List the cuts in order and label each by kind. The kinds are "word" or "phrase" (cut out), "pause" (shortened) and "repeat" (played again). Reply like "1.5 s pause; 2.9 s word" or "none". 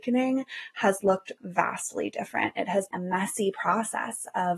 1.4 s word; 2.9 s word